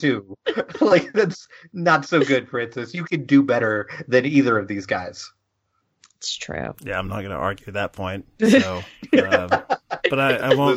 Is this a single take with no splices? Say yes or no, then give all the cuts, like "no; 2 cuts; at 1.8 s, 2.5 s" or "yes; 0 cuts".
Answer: yes; 0 cuts